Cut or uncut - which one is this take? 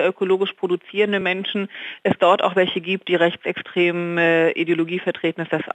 uncut